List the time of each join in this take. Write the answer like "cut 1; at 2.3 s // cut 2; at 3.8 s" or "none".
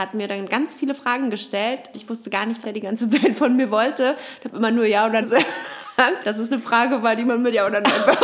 cut 1; at 1.9 s // cut 2; at 2.6 s // cut 3; at 5.2 s // cut 4; at 6.2 s